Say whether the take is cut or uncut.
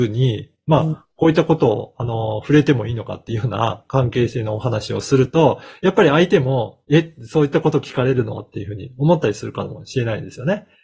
uncut